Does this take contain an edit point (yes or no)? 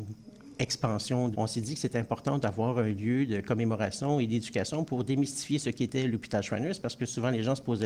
yes